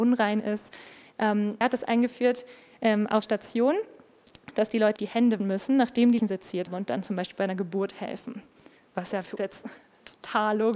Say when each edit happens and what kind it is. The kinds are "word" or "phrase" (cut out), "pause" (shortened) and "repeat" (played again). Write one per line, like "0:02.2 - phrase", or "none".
0:01.6 - word
0:03.2 - word
0:05.0 - word
0:05.4 - word
0:06.2 - word
0:06.7 - word
0:09.4 - word